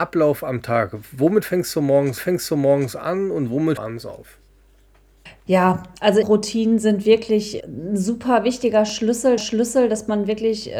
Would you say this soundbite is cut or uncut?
cut